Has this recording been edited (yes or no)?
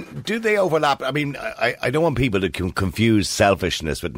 no